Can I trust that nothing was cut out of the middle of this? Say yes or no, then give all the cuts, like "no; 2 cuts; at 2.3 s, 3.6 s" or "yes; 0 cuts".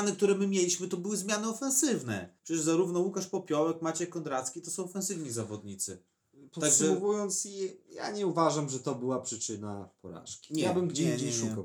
no; 2 cuts; at 2.4 s, 7.8 s